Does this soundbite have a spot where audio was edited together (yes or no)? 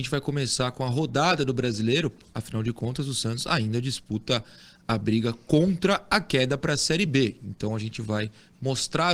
no